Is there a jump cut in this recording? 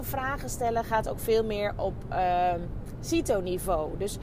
yes; 1 cut; at 1.8 s

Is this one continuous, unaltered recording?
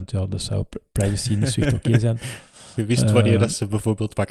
yes; 0 cuts

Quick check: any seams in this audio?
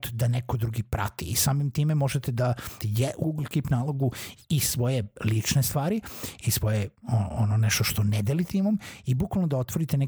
yes; 3 cuts; at 2.8 s, 3.2 s, 8.5 s

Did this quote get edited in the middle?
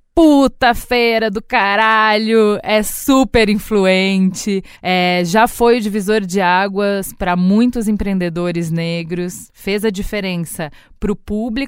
yes; 1 cut; at 4.8 s

